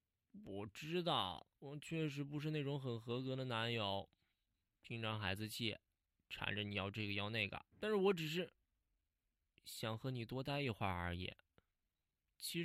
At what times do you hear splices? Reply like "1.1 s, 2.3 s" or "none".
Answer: 1.5 s, 4.8 s, 5.9 s, 7.7 s